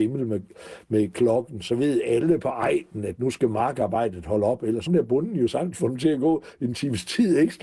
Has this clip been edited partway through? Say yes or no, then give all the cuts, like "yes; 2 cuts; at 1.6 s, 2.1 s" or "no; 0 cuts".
yes; 1 cut; at 4.9 s